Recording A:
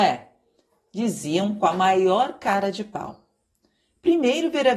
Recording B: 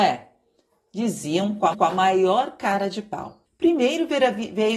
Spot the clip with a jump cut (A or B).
B